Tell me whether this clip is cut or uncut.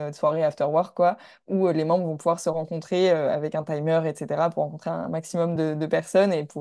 uncut